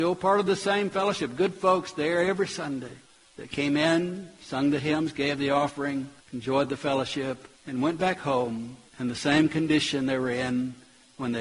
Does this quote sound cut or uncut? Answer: cut